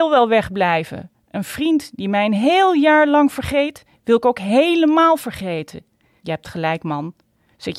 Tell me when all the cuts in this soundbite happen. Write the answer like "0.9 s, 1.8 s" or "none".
none

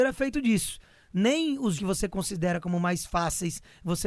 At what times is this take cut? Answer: 1.8 s

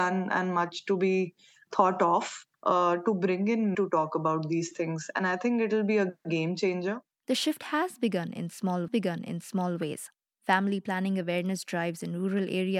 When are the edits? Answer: 1.7 s, 2.5 s, 3.7 s, 8.9 s

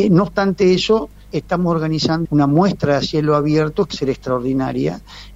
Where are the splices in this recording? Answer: 2.2 s, 3.9 s

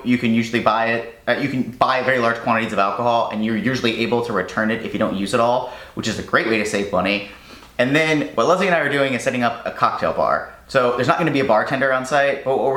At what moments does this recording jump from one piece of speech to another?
none

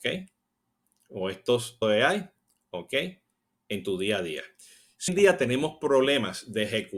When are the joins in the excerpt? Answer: 1.8 s, 5.1 s

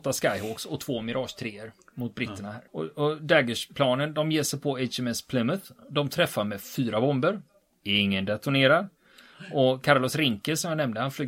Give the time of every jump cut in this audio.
2.7 s

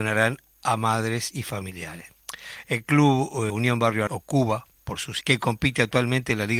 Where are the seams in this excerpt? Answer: 3.5 s, 4.1 s, 5.2 s

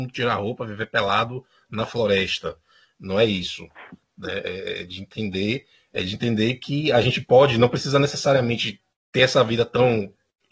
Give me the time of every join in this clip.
none

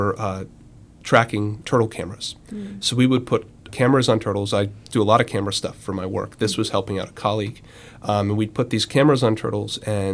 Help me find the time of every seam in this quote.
1.6 s, 3.7 s

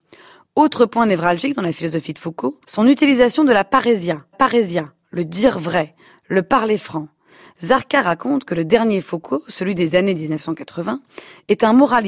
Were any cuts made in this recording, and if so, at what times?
2.6 s, 4.3 s

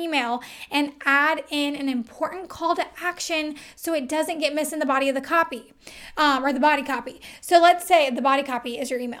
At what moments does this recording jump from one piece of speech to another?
none

